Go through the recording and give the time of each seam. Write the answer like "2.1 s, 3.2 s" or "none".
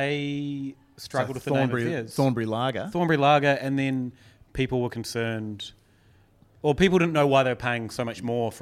none